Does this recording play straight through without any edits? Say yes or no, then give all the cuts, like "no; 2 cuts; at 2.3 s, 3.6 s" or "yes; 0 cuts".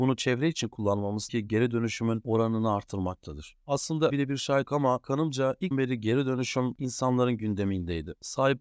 no; 4 cuts; at 1.3 s, 4.1 s, 4.7 s, 5.7 s